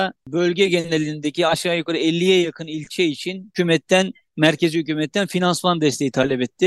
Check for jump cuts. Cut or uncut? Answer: uncut